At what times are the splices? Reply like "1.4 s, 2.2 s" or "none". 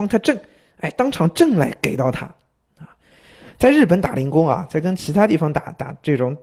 none